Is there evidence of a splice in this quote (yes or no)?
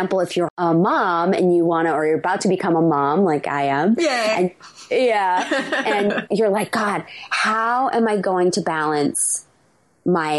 no